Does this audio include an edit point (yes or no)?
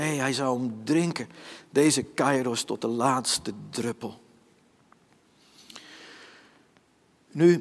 no